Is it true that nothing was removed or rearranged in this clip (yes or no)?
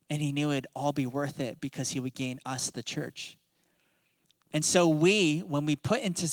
yes